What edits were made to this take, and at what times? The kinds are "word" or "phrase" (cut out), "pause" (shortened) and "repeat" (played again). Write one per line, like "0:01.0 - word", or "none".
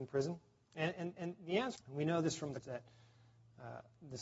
0:01.2 - repeat
0:01.8 - phrase
0:02.6 - word